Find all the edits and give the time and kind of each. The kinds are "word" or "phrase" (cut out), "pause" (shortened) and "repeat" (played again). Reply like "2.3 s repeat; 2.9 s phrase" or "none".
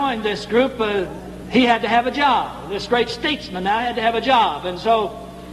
none